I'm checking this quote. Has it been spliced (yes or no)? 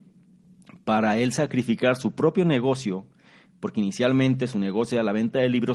no